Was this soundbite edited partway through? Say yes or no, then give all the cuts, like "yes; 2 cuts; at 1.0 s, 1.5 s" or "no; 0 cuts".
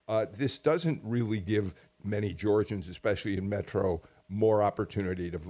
no; 0 cuts